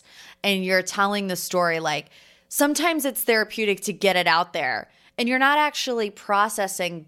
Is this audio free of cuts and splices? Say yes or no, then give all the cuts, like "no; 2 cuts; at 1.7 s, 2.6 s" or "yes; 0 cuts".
yes; 0 cuts